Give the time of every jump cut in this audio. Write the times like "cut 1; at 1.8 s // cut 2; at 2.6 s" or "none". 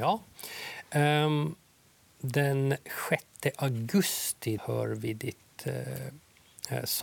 cut 1; at 4.6 s